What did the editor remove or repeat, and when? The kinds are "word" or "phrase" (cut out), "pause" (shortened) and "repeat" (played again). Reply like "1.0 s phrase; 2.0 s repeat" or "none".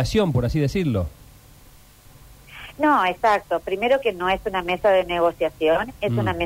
none